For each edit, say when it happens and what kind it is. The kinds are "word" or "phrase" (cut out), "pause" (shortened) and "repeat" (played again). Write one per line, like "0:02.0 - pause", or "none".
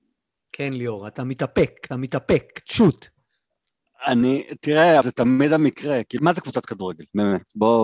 0:01.9 - repeat
0:05.0 - word
0:06.2 - phrase